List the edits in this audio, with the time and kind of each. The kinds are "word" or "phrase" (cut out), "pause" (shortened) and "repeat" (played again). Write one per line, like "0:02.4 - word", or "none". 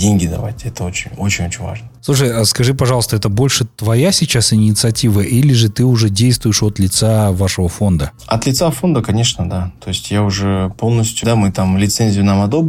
0:11.2 - phrase